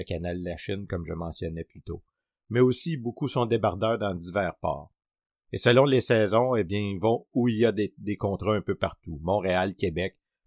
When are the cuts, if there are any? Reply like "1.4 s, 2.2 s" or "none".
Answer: none